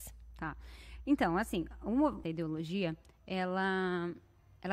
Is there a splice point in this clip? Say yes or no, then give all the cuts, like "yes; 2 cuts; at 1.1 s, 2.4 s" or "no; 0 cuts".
yes; 1 cut; at 2.2 s